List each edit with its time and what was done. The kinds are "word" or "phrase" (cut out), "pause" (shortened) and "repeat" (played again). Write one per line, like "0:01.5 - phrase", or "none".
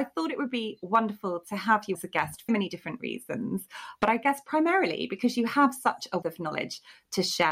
0:01.9 - word
0:02.5 - word
0:06.2 - word